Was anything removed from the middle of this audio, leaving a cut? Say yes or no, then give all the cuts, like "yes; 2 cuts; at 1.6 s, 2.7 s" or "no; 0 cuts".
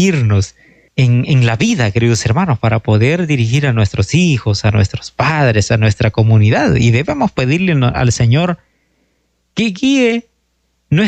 no; 0 cuts